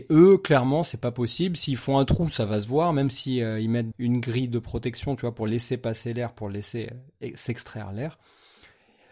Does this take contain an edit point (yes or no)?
yes